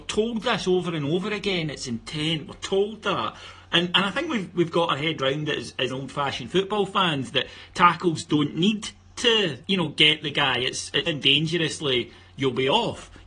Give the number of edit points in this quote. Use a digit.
3